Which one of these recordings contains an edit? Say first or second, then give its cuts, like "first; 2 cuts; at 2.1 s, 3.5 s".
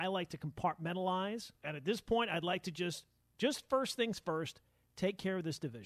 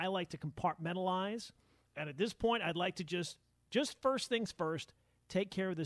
first; 1 cut; at 1.6 s